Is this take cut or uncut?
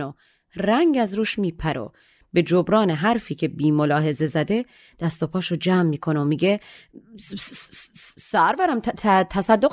uncut